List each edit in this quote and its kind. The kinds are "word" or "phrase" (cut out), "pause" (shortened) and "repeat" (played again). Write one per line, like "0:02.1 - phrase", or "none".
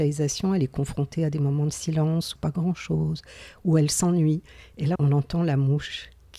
0:02.4 - phrase
0:05.0 - word